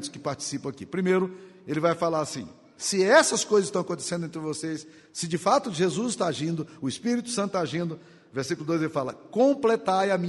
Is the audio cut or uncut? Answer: uncut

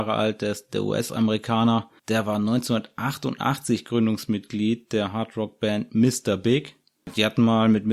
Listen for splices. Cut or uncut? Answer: cut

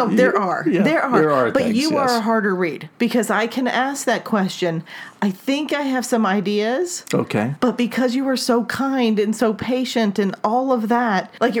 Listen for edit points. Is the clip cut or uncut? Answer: uncut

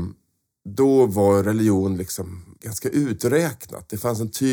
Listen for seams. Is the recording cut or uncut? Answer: cut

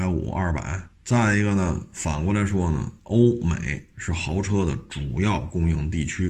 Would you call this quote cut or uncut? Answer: cut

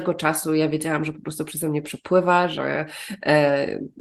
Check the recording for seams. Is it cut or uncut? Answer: uncut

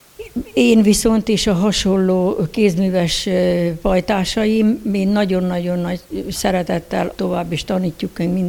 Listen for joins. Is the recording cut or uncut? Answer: cut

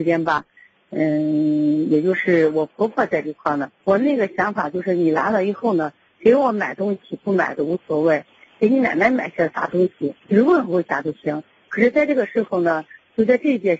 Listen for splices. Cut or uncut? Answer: cut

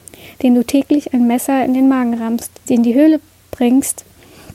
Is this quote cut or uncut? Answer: cut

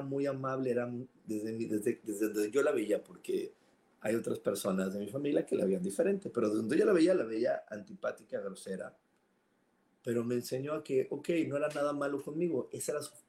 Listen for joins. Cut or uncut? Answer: uncut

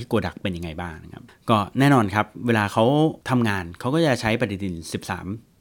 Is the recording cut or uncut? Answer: cut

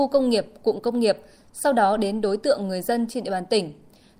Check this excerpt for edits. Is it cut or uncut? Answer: uncut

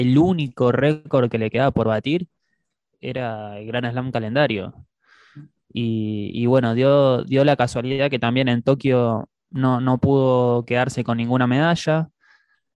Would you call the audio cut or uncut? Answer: uncut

